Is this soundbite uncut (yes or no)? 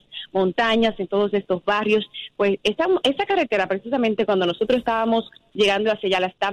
yes